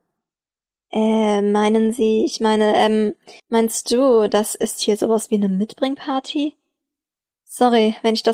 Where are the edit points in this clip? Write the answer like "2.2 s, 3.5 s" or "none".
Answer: 3.4 s